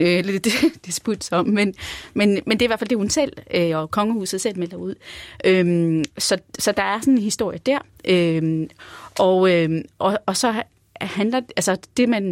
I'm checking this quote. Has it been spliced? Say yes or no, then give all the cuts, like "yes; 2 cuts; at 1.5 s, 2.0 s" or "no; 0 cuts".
no; 0 cuts